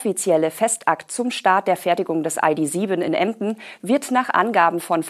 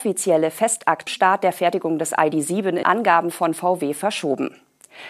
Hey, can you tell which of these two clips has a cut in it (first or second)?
second